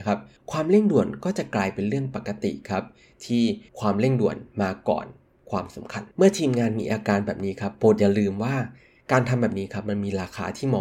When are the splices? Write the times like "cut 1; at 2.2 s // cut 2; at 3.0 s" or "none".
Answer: cut 1; at 3.7 s // cut 2; at 6.1 s